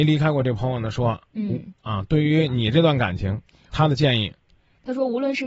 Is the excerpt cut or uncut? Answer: uncut